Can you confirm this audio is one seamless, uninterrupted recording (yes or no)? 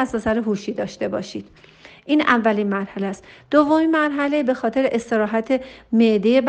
yes